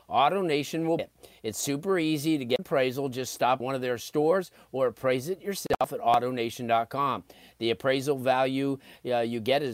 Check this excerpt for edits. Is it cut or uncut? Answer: cut